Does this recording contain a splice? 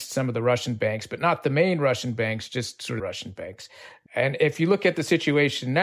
yes; 1 cut; at 3.0 s

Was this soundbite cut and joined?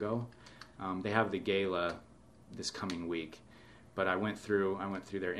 no; 0 cuts

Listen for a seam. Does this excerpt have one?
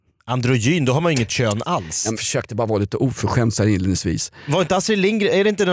yes; 1 cut; at 2.1 s

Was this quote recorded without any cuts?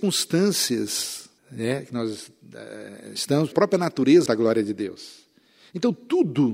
no; 3 cuts; at 1.4 s, 3.5 s, 4.3 s

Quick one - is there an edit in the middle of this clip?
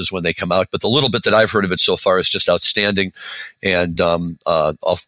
no; 0 cuts

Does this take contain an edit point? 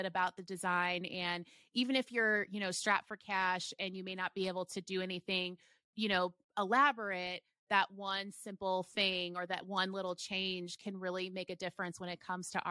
no; 0 cuts

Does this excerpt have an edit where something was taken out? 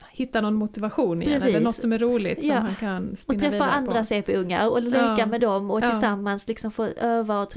no; 0 cuts

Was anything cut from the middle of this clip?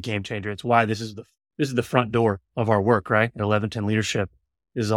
no; 0 cuts

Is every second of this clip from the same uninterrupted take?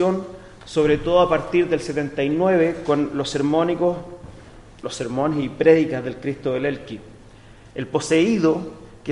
no; 1 cut; at 4.8 s

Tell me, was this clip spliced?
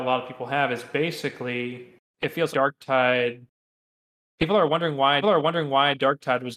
yes; 3 cuts; at 2.1 s, 2.5 s, 5.2 s

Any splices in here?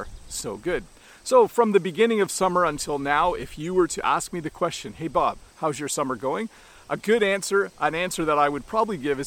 yes; 1 cut; at 5.5 s

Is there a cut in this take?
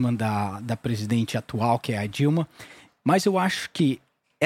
no; 0 cuts

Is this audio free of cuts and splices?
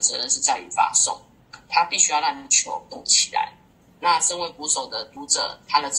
yes; 0 cuts

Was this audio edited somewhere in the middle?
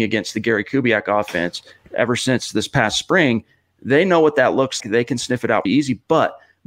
yes; 2 cuts; at 4.8 s, 5.6 s

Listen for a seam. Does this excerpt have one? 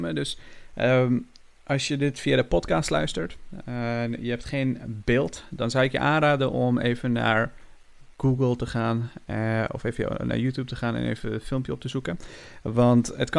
no; 0 cuts

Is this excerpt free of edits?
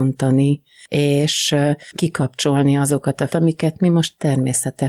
no; 2 cuts; at 1.9 s, 3.3 s

